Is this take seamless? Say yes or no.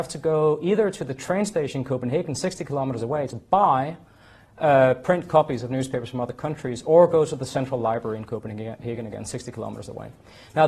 yes